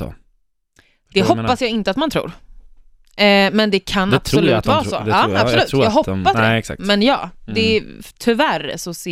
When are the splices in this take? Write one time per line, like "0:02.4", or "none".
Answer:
0:06.3